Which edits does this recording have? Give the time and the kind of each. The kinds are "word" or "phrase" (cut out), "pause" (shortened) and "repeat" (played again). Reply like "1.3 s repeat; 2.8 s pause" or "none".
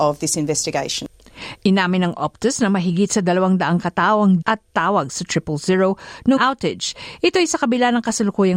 4.4 s phrase; 6.4 s phrase